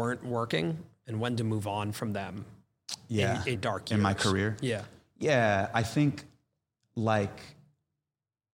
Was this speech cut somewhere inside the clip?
yes; 1 cut; at 3.6 s

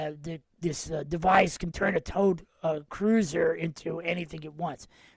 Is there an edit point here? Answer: yes; 1 cut; at 1.7 s

